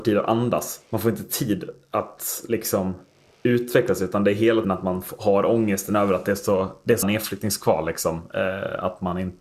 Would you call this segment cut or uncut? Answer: cut